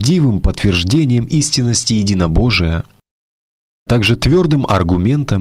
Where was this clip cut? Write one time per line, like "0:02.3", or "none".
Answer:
0:03.9

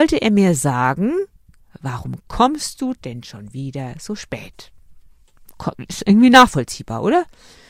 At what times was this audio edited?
none

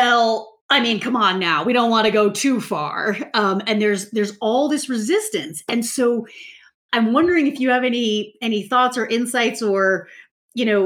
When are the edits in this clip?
none

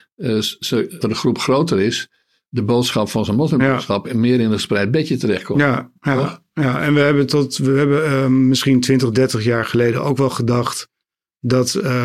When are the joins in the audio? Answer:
0:01.0

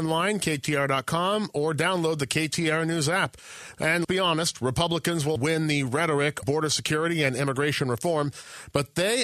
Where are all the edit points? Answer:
0:04.0
0:05.4
0:06.4

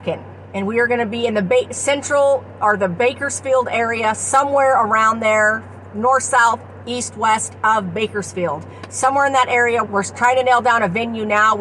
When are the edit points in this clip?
0:09.9

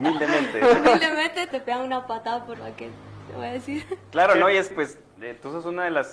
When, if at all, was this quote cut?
0:01.5
0:02.5
0:04.7

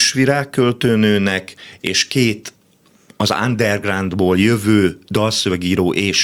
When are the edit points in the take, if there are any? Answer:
none

